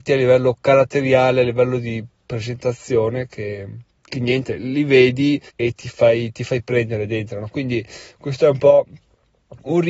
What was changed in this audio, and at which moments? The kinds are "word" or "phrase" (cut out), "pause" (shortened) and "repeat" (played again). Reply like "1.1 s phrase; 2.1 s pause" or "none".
3.9 s pause; 5.5 s pause